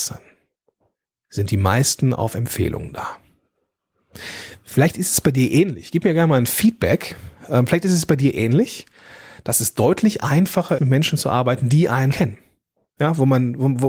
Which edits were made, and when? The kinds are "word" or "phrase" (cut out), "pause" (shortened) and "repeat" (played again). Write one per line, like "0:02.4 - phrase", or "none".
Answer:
0:10.8 - word
0:12.1 - word

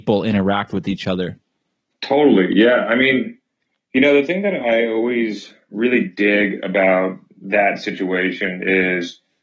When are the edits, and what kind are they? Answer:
none

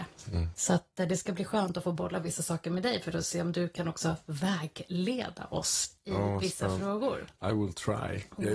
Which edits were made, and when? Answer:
none

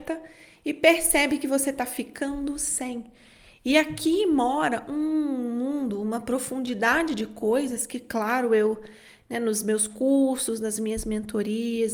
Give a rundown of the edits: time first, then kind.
none

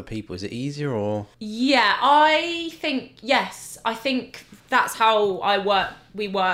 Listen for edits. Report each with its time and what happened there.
0:01.3 - pause
0:04.6 - pause

